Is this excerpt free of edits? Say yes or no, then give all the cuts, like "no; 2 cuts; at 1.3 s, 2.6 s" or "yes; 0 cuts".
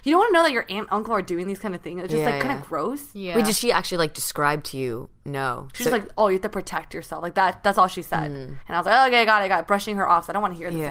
yes; 0 cuts